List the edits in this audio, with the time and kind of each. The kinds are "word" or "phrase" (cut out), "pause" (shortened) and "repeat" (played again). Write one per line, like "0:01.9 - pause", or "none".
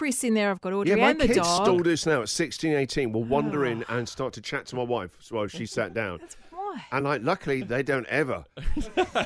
none